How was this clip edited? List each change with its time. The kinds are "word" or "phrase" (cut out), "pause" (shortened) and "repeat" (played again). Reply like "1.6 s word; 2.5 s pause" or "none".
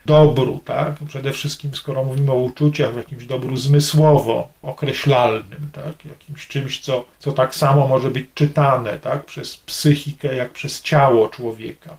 7.1 s pause